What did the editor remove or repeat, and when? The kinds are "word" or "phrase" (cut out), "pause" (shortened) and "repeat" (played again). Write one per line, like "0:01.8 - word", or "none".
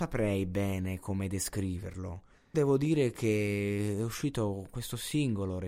0:02.5 - word